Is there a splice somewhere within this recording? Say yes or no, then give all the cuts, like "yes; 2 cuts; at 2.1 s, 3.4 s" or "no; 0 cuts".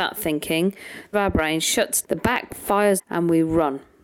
yes; 4 cuts; at 1.1 s, 2.0 s, 2.5 s, 3.0 s